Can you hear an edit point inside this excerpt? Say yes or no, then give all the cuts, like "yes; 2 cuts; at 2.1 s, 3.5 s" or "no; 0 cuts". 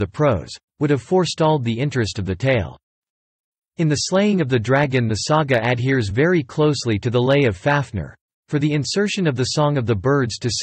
no; 0 cuts